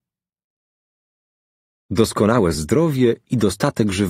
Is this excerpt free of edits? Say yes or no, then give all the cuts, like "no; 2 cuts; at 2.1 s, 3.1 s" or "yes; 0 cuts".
yes; 0 cuts